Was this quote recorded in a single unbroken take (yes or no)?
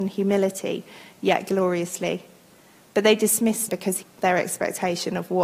no